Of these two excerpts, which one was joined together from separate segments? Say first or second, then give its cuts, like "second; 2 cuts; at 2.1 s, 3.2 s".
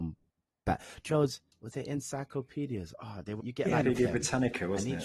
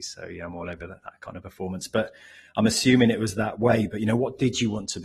first; 4 cuts; at 1.1 s, 1.5 s, 3.4 s, 3.8 s